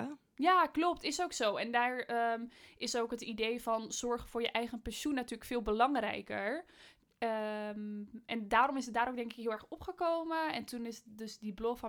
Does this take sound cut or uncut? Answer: uncut